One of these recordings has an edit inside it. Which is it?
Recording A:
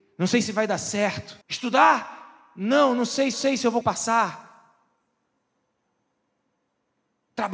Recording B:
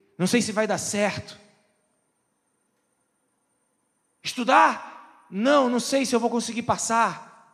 A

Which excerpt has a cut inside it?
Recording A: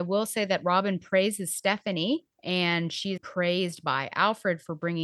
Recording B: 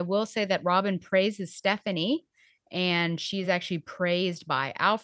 A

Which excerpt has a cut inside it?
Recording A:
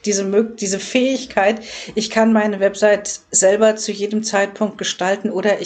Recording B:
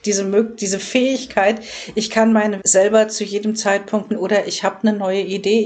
B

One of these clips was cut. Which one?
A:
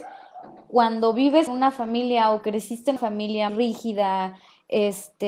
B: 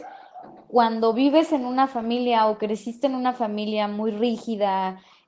A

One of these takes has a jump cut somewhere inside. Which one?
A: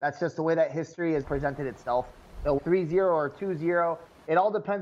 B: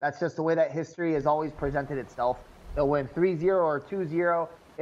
A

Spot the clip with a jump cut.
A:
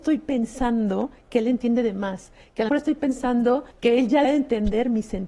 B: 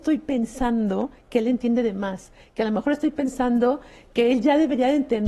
A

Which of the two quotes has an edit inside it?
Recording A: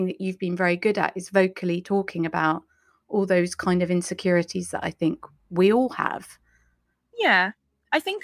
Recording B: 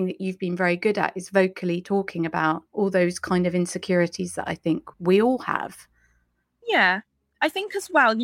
B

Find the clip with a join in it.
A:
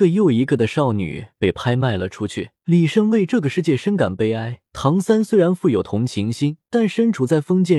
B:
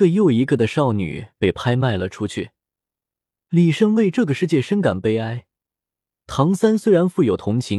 A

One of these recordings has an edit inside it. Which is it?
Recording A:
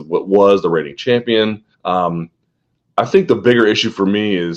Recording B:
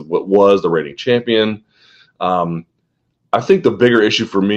A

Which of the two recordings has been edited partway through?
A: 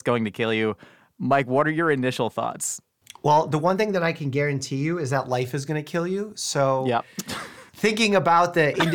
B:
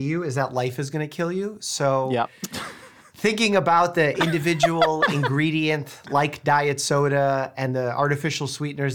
A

